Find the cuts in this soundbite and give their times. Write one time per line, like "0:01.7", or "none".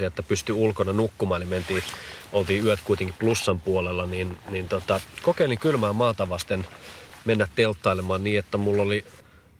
none